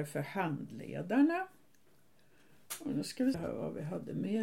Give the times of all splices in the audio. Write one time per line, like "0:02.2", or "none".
0:03.3